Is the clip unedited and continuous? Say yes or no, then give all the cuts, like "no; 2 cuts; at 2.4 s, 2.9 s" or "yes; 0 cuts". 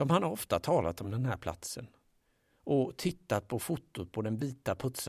yes; 0 cuts